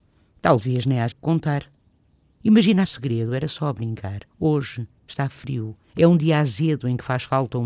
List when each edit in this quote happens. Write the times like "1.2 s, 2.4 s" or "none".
1.1 s, 2.9 s, 4.3 s, 5.8 s